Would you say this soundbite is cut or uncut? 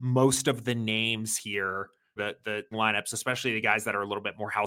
cut